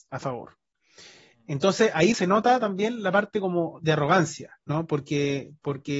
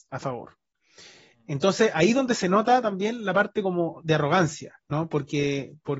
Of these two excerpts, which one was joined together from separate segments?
first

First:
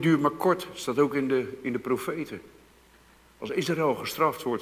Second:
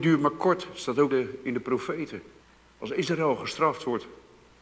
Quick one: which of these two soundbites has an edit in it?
second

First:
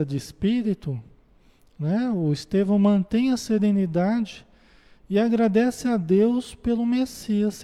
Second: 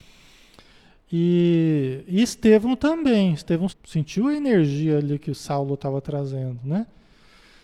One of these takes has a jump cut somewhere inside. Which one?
second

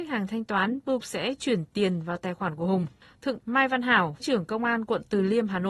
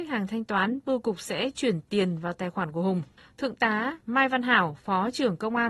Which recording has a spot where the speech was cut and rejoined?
first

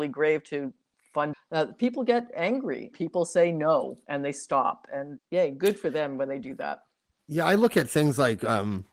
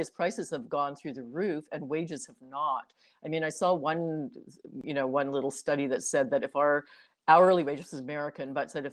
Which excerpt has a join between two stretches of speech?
first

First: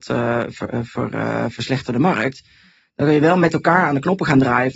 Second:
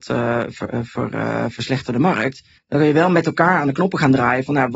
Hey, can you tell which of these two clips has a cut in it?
second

